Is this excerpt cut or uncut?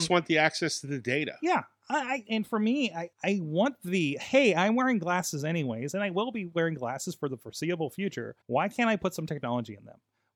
cut